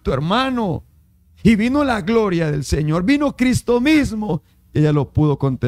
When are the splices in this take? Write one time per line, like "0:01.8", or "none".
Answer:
none